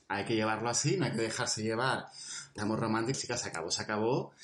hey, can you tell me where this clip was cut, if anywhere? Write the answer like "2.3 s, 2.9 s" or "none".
2.6 s, 3.1 s